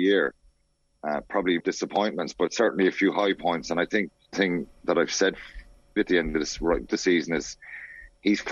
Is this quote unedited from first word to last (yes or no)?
no